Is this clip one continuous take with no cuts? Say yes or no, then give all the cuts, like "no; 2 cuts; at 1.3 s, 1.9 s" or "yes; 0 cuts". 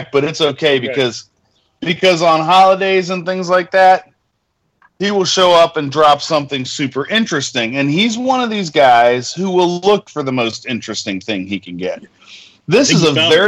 yes; 0 cuts